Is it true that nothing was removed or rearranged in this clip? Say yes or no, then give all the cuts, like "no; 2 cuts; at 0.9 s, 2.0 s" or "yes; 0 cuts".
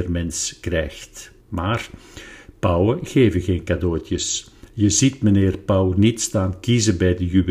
no; 1 cut; at 1.4 s